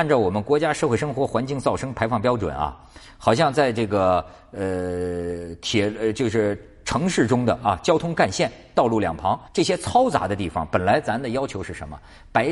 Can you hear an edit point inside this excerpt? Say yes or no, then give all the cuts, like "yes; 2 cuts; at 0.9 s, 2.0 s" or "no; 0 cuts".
yes; 1 cut; at 9.5 s